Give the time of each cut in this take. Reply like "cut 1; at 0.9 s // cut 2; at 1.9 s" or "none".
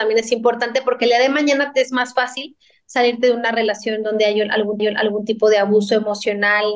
cut 1; at 4.8 s